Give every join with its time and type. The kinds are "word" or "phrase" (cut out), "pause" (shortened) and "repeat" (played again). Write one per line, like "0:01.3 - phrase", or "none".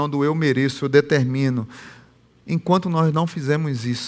none

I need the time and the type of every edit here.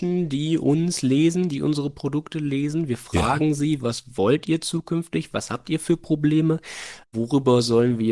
0:07.0 - pause

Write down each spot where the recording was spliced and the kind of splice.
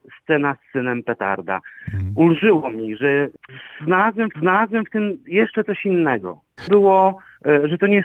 0:04.3 - repeat
0:06.7 - phrase

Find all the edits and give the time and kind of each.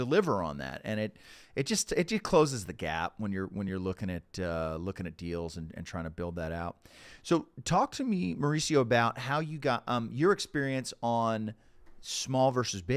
none

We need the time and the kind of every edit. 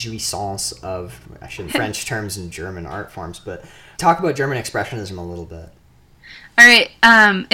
0:01.7 - word
0:03.9 - word

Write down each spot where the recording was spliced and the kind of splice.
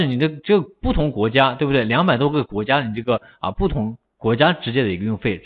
none

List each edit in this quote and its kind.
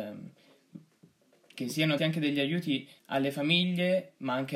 0:02.0 - word
0:03.0 - pause

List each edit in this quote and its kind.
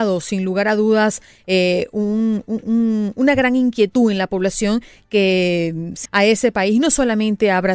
0:06.0 - word

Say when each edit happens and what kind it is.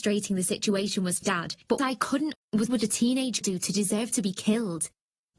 0:01.2 - word
0:01.8 - word
0:02.3 - word
0:02.7 - word
0:03.4 - word

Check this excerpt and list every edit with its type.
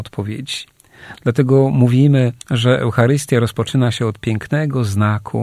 0:02.4 - pause

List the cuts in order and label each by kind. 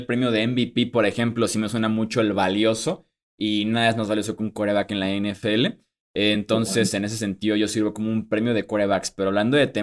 none

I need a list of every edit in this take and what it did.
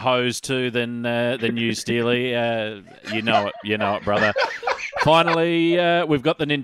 none

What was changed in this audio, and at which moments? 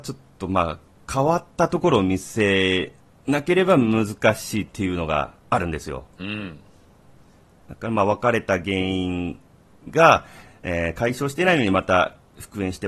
0:01.0 - pause

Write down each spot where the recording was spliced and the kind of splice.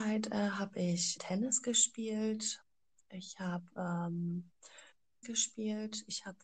0:01.2 - word
0:05.2 - word

